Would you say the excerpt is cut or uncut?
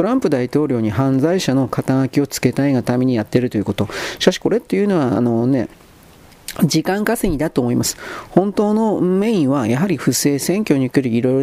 uncut